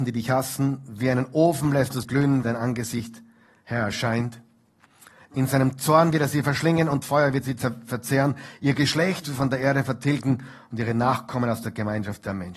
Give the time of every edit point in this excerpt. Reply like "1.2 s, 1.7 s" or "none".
2.0 s, 2.4 s, 7.0 s, 9.2 s